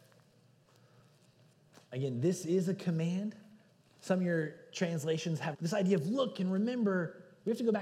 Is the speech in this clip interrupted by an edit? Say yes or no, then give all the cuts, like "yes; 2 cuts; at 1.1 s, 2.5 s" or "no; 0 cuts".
yes; 3 cuts; at 1.8 s, 3.7 s, 5.5 s